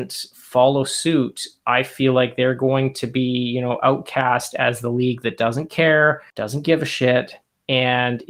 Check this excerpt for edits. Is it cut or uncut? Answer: cut